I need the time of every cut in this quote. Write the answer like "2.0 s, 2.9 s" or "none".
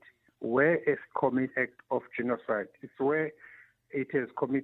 1.1 s, 1.5 s